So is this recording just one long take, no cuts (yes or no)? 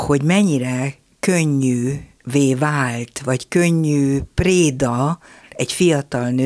yes